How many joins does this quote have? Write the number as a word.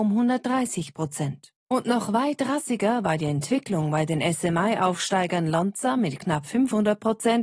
one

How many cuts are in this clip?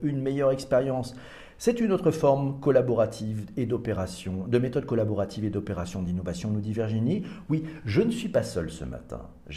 zero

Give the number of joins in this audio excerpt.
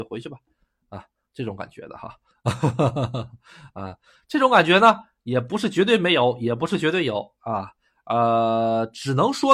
zero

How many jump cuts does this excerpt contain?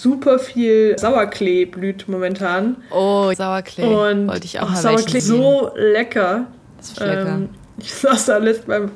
four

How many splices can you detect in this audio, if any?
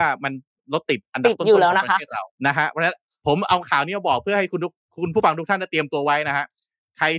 one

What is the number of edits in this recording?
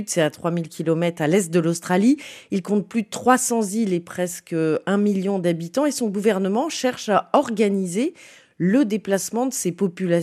zero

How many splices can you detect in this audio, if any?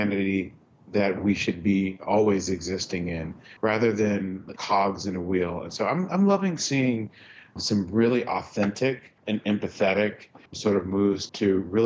four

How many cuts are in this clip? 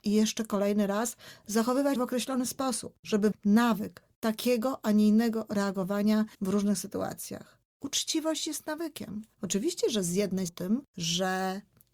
five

